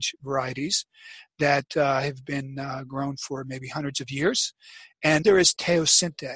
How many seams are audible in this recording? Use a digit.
1